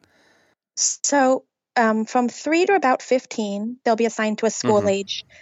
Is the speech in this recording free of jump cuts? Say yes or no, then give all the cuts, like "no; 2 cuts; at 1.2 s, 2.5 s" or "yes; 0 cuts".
yes; 0 cuts